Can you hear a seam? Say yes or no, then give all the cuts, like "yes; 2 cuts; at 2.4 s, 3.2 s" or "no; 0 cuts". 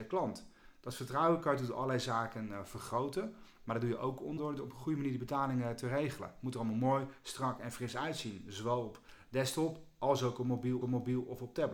yes; 2 cuts; at 4.4 s, 10.8 s